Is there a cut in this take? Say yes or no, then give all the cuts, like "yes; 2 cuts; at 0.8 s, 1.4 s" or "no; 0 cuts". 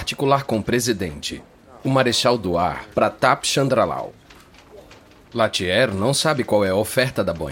no; 0 cuts